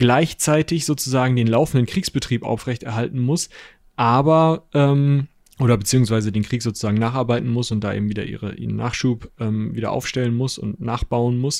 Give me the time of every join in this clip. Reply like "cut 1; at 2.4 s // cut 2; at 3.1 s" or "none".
none